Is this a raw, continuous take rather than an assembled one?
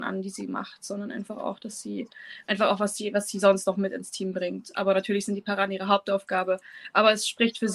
yes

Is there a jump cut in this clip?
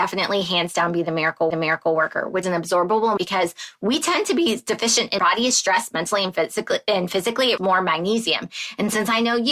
yes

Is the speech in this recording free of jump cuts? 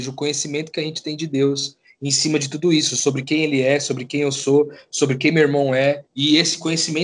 no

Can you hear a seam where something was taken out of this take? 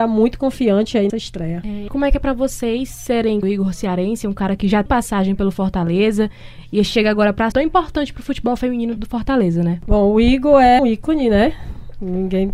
yes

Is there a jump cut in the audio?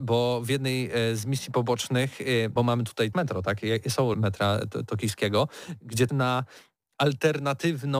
yes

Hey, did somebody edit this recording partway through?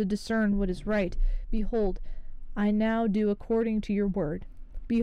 no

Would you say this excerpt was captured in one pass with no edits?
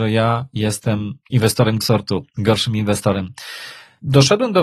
no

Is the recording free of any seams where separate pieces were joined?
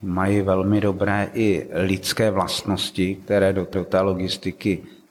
no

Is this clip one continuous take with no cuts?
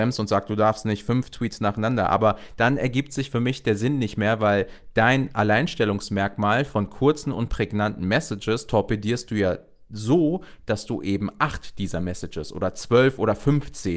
yes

